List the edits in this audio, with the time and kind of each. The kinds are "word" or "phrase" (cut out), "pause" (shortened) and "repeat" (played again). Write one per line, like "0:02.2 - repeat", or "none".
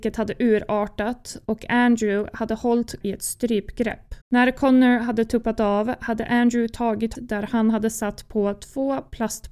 0:03.0 - word
0:04.2 - pause
0:07.1 - phrase